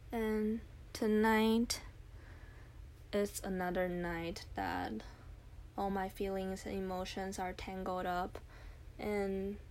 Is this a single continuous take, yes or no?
yes